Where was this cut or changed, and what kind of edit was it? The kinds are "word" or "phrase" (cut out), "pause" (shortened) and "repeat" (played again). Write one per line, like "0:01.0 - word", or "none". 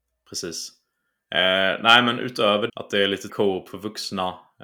0:02.7 - word
0:03.3 - word